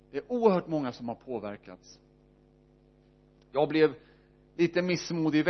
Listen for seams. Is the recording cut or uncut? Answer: uncut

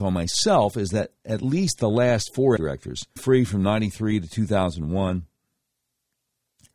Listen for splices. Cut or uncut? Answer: cut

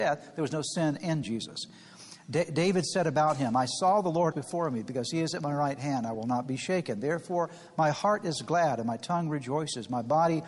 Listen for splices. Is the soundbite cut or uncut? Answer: cut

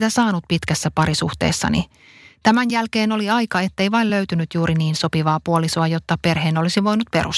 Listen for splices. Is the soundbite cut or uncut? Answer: uncut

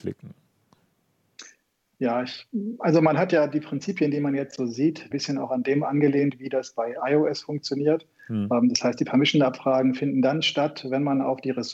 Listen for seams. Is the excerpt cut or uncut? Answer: cut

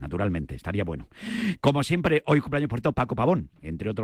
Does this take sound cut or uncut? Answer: uncut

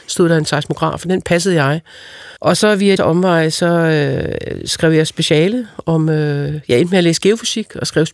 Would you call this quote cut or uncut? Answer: cut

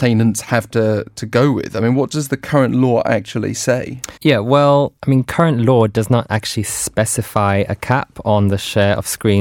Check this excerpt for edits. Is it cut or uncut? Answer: cut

